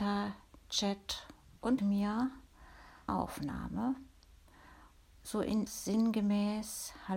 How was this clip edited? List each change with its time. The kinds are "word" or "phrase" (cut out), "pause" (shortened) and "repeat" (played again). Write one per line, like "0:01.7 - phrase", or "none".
0:01.8 - word
0:03.1 - word
0:05.7 - word